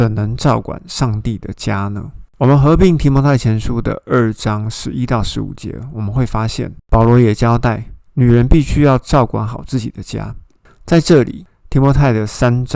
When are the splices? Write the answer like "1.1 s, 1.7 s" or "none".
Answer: 2.3 s, 6.8 s